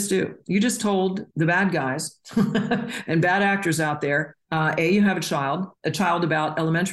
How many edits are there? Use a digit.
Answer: 2